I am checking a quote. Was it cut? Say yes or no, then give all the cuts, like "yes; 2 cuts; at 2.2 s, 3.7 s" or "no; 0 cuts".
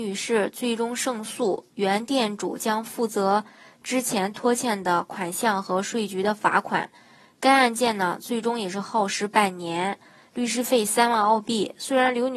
no; 0 cuts